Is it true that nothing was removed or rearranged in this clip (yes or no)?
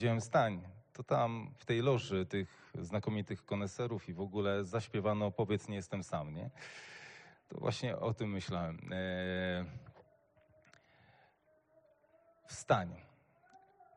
yes